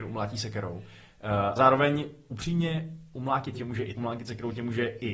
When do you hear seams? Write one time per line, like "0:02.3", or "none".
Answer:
0:01.6
0:02.2
0:03.5
0:03.9